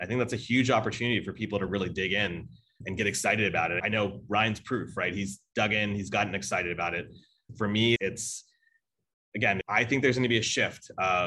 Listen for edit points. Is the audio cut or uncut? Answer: uncut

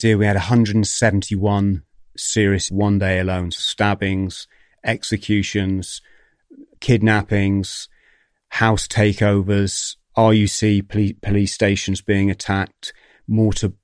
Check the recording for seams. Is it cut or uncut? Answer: cut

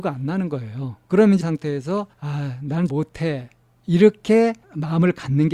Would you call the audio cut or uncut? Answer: cut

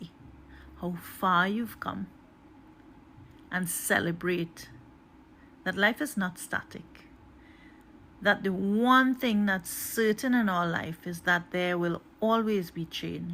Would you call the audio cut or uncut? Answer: uncut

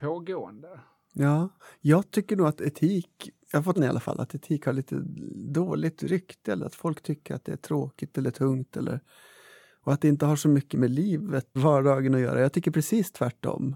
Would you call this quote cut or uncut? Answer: cut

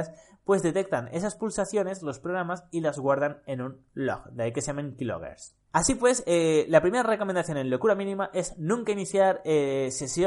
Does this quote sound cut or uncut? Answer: cut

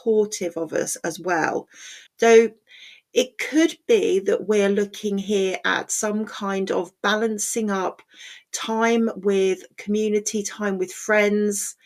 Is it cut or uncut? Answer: cut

